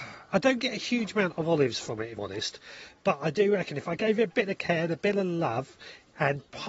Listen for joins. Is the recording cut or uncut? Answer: cut